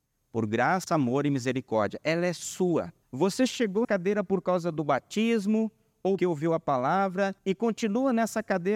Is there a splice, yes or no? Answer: yes